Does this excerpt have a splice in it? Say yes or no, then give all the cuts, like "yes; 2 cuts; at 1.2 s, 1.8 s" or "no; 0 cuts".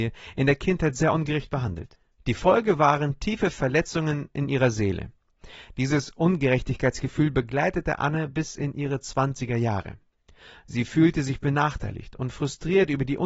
no; 0 cuts